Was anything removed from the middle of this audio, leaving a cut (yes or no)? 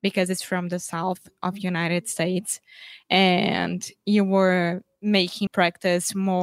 yes